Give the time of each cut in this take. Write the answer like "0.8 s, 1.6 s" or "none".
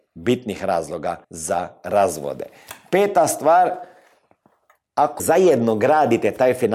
1.2 s, 5.2 s